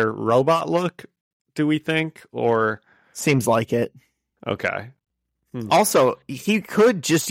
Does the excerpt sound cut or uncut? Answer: uncut